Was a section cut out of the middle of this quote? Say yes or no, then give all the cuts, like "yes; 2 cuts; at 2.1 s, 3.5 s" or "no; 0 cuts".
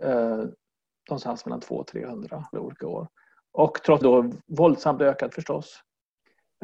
yes; 3 cuts; at 2.5 s, 4.0 s, 5.3 s